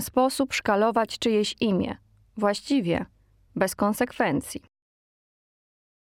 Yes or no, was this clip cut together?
no